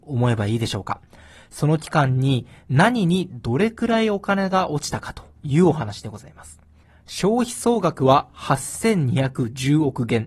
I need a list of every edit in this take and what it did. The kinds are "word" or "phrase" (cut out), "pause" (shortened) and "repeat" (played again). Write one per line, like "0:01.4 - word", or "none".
none